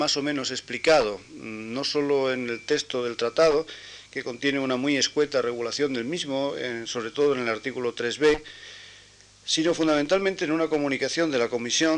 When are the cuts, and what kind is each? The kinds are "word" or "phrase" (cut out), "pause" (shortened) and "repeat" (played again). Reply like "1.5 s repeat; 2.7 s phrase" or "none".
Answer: none